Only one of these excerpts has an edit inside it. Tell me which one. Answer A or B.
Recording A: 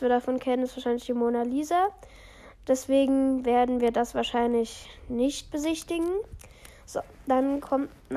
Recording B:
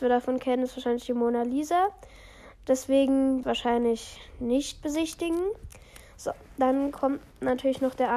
B